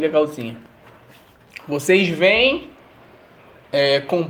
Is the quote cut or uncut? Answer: uncut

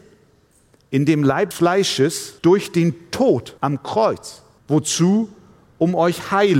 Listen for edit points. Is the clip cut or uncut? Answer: cut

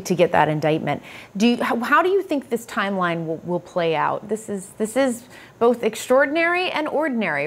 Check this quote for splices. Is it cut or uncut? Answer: uncut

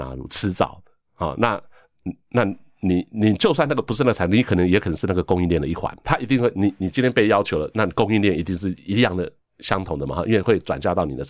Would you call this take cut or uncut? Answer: cut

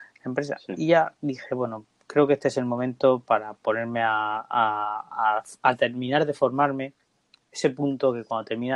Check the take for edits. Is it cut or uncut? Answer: uncut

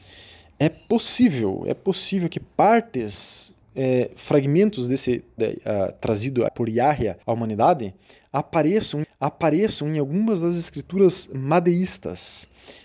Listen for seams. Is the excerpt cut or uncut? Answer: cut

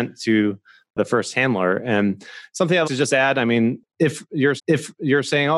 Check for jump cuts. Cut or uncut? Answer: cut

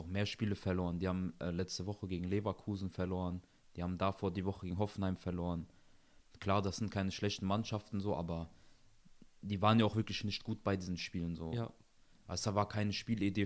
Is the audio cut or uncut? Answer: uncut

